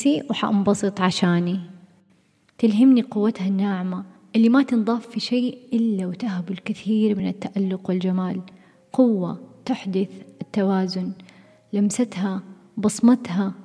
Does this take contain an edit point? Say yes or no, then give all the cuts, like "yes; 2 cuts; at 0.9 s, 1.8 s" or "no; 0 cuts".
no; 0 cuts